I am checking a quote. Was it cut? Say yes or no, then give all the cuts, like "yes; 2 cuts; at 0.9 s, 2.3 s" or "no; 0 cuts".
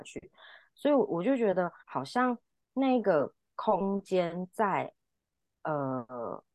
yes; 1 cut; at 1.8 s